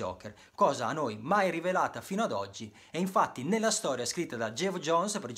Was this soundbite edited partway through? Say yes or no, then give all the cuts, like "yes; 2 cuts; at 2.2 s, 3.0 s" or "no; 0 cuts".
no; 0 cuts